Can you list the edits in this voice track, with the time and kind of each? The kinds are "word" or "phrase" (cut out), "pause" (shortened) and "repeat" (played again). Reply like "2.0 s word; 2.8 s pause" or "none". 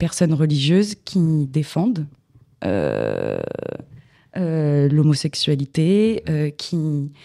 none